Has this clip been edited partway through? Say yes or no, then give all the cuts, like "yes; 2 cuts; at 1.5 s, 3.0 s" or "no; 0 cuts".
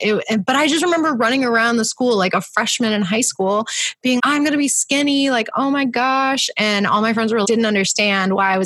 yes; 2 cuts; at 4.2 s, 7.4 s